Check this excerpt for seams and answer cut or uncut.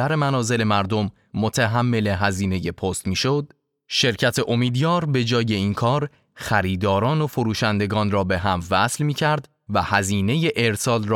uncut